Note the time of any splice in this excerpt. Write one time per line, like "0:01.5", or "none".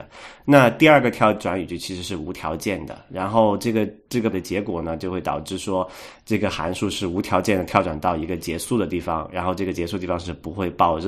0:04.3